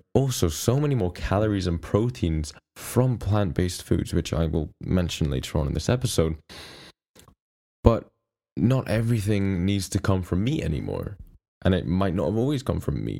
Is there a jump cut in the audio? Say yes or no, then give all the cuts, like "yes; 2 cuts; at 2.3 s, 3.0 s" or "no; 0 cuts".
no; 0 cuts